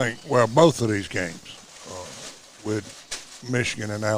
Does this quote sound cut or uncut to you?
uncut